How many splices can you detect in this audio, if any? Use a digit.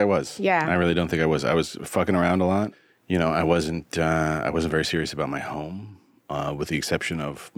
0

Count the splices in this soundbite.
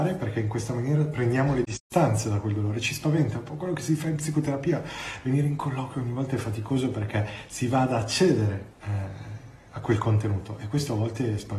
1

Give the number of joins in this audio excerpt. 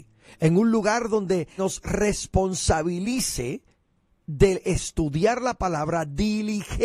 1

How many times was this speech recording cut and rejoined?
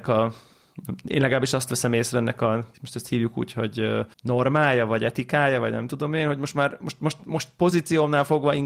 2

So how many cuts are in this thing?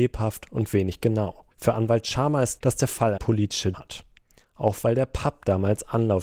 4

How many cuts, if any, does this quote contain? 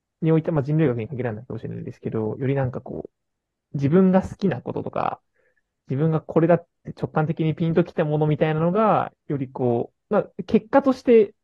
0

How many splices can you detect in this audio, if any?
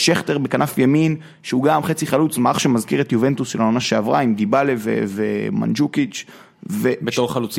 0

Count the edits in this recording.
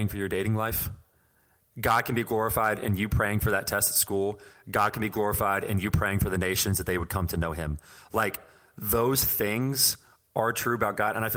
0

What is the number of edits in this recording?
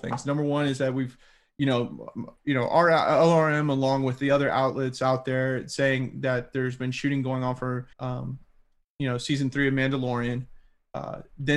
2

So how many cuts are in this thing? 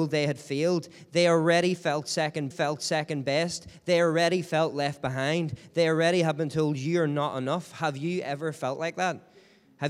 1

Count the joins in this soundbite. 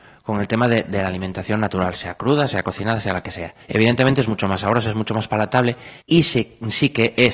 2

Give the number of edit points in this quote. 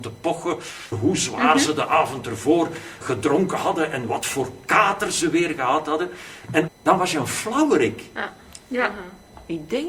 3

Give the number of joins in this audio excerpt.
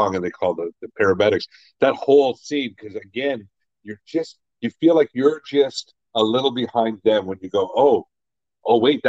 0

